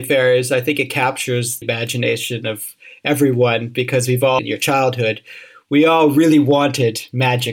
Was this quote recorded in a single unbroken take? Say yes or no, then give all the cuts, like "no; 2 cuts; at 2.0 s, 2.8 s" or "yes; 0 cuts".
no; 2 cuts; at 1.6 s, 4.4 s